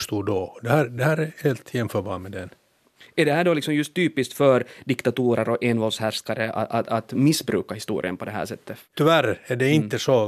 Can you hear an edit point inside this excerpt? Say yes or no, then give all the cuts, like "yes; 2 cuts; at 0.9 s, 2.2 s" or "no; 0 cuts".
no; 0 cuts